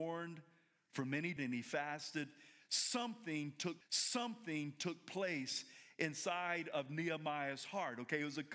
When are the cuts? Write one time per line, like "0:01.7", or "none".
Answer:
0:01.4
0:03.8